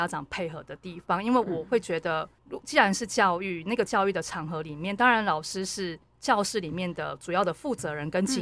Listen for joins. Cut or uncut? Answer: cut